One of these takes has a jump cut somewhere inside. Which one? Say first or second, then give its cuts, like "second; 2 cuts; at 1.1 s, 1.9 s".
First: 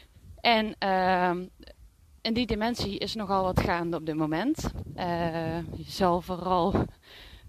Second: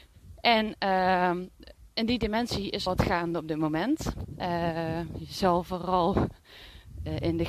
second; 2 cuts; at 1.9 s, 2.9 s